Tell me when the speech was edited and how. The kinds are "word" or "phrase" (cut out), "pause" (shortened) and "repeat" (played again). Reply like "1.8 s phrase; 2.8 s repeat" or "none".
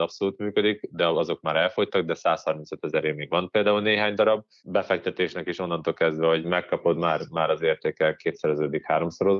none